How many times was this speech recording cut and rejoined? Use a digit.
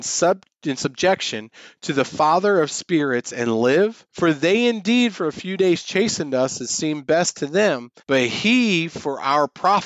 2